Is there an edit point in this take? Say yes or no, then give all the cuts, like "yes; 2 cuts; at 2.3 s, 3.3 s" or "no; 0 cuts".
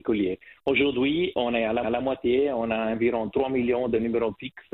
yes; 1 cut; at 1.8 s